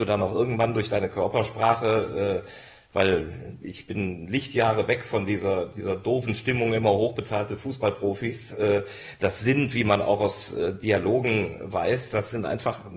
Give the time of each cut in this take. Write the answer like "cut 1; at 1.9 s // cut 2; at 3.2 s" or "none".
none